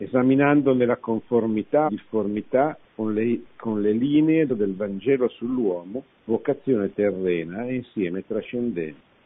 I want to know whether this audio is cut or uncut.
cut